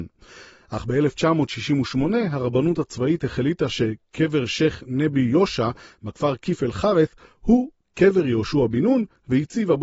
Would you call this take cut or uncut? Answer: uncut